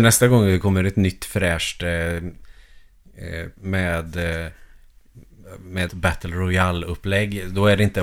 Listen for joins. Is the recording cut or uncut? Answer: cut